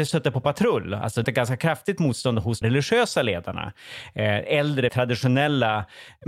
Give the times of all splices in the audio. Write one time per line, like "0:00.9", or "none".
0:01.2
0:02.6
0:04.9